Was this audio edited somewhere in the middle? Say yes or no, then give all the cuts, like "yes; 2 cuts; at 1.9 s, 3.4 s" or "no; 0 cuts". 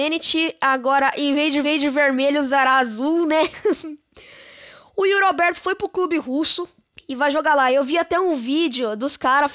yes; 2 cuts; at 1.6 s, 6.9 s